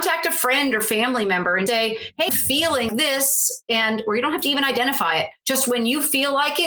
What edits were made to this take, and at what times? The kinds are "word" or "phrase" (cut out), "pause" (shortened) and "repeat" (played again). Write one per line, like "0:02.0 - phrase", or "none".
0:01.7 - word
0:02.3 - word
0:02.9 - word